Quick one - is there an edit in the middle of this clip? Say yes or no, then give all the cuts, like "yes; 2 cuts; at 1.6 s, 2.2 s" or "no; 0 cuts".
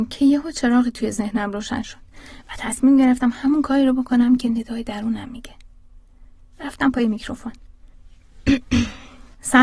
no; 0 cuts